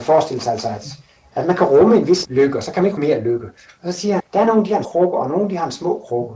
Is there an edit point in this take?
yes; 4 cuts; at 2.2 s, 3.0 s, 4.2 s, 4.8 s

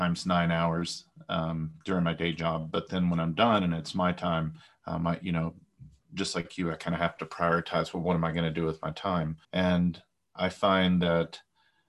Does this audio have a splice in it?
yes; 2 cuts; at 4.7 s, 9.4 s

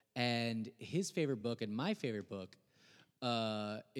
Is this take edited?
no; 0 cuts

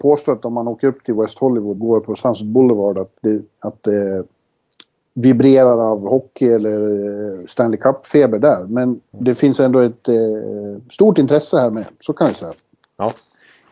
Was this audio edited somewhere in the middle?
yes; 2 cuts; at 1.8 s, 3.2 s

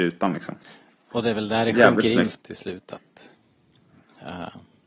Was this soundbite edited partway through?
yes; 1 cut; at 2.3 s

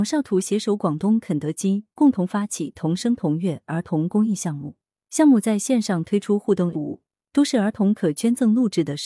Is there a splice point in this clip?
yes; 1 cut; at 6.7 s

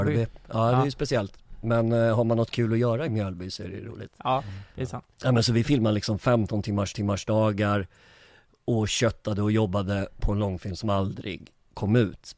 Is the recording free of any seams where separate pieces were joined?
no; 2 cuts; at 5.1 s, 6.9 s

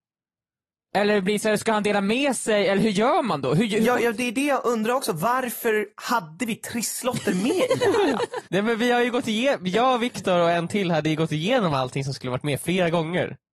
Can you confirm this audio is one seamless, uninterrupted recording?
no; 1 cut; at 8.5 s

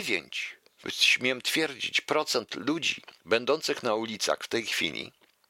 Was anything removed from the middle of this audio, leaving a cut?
yes; 1 cut; at 3.2 s

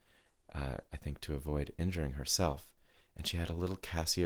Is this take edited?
no; 0 cuts

